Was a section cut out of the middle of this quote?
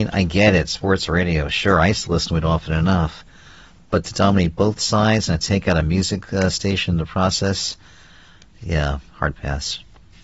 no; 0 cuts

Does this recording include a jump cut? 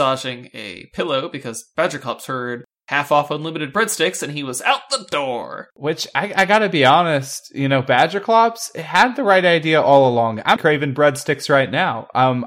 yes; 1 cut; at 10.6 s

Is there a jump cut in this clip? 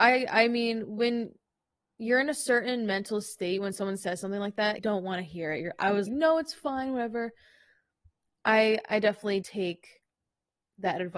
yes; 3 cuts; at 4.8 s, 6.1 s, 9.4 s

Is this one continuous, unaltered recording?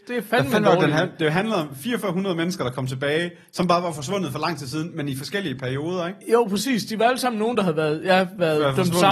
yes; 0 cuts

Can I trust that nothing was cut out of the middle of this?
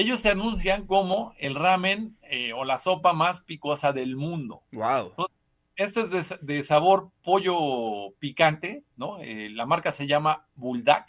yes; 0 cuts

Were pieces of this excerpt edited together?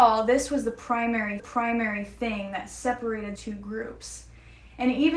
yes; 2 cuts; at 1.4 s, 3.4 s

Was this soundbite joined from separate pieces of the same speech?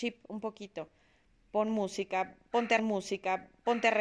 yes; 1 cut; at 2.8 s

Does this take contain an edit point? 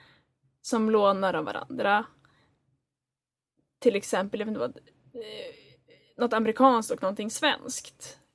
no; 0 cuts

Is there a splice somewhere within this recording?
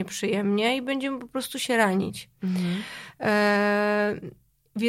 no; 0 cuts

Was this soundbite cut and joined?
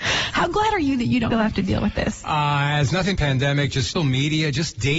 yes; 3 cuts; at 1.3 s, 3.2 s, 4.0 s

